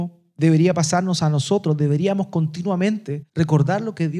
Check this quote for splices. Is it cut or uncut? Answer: cut